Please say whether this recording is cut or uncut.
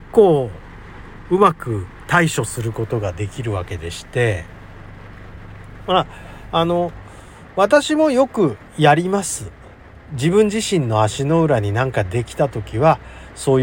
uncut